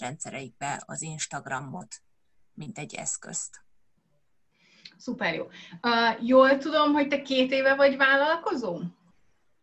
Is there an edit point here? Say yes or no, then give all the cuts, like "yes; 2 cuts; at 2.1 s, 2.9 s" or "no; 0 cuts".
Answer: no; 0 cuts